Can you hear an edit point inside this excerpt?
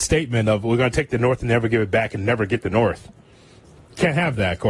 no; 0 cuts

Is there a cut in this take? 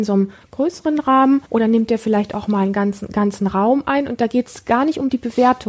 yes; 1 cut; at 1.5 s

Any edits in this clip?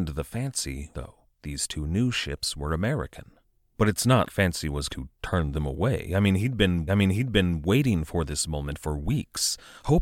yes; 6 cuts; at 0.9 s, 1.3 s, 3.4 s, 4.2 s, 4.9 s, 6.9 s

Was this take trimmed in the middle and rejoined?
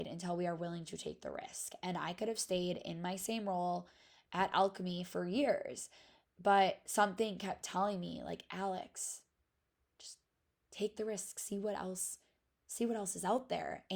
no; 0 cuts

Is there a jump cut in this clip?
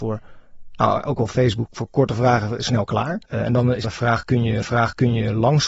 yes; 4 cuts; at 1.7 s, 3.3 s, 3.8 s, 4.6 s

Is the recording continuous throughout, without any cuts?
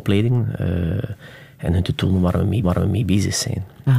no; 1 cut; at 2.6 s

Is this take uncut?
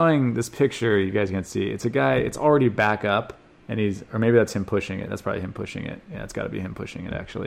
yes; 0 cuts

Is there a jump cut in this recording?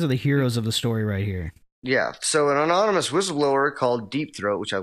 no; 0 cuts

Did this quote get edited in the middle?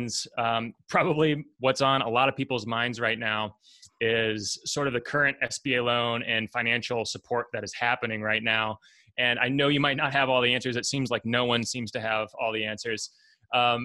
no; 0 cuts

